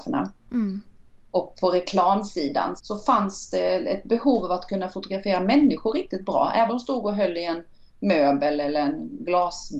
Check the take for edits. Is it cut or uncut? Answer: cut